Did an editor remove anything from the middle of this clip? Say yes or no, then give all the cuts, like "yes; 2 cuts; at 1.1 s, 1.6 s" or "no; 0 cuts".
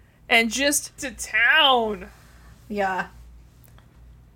yes; 1 cut; at 1.0 s